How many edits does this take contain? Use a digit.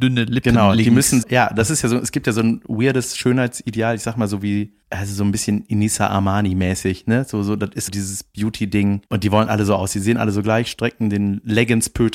4